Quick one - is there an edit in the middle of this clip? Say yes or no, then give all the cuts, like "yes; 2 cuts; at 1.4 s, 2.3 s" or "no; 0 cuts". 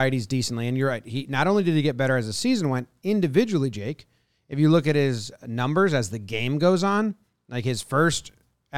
no; 0 cuts